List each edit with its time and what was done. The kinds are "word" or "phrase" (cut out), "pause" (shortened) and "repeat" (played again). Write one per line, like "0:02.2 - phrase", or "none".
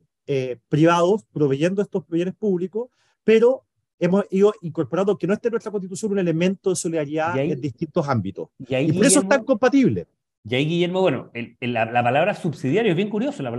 none